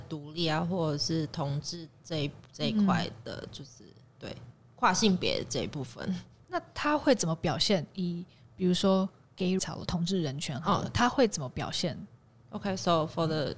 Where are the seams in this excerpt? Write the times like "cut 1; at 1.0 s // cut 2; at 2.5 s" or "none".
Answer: cut 1; at 9.6 s